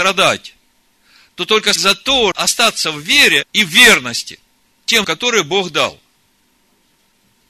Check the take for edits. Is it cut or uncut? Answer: cut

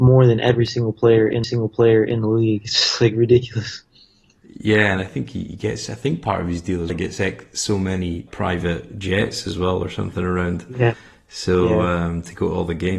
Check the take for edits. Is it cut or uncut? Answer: cut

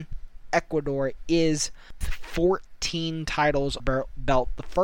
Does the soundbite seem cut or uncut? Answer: cut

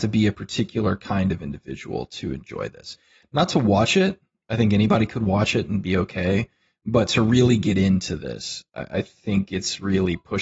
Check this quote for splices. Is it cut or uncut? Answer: uncut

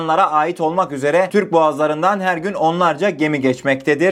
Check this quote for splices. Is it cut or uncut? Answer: uncut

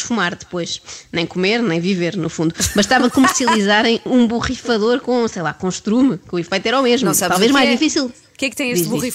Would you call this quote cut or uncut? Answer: uncut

